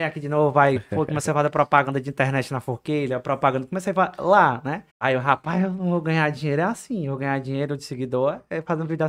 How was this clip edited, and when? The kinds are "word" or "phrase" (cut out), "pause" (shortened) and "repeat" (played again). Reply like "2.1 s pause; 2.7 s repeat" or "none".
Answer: 4.9 s pause

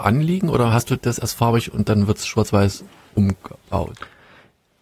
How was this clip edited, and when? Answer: none

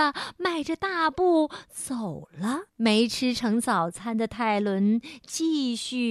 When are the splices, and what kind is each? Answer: 2.7 s pause

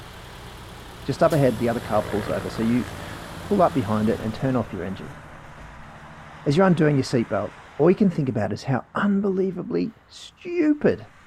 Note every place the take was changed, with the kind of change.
4.2 s word; 7.7 s pause

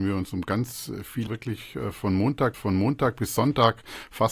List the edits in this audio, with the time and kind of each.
1.3 s phrase; 2.5 s repeat

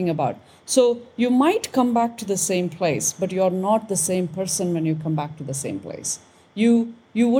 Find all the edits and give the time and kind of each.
none

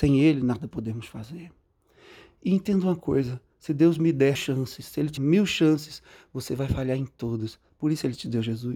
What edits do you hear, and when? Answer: 4.3 s word; 5.2 s word

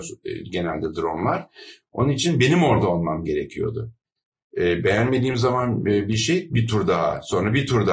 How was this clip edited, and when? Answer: none

